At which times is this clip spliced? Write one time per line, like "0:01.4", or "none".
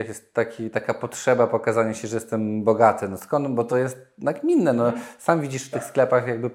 none